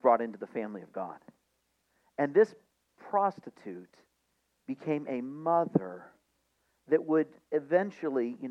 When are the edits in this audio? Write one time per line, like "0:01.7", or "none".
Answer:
none